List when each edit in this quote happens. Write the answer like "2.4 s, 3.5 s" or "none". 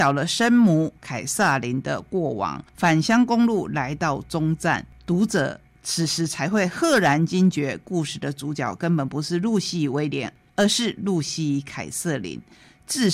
1.0 s, 2.7 s